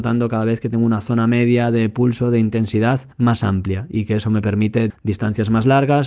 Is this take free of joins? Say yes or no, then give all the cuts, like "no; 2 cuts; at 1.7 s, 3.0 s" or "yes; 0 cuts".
no; 2 cuts; at 3.1 s, 4.9 s